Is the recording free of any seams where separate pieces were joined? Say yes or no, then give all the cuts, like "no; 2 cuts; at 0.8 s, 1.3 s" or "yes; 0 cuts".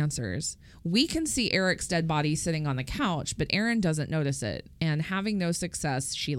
yes; 0 cuts